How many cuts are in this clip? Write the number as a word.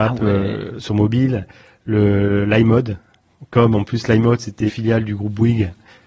one